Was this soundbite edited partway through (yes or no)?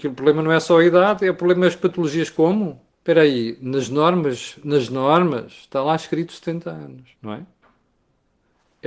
yes